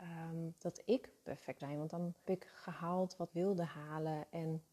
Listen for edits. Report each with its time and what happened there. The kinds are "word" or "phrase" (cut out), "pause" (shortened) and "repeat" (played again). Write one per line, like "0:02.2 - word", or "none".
0:01.6 - word
0:02.2 - word
0:03.3 - word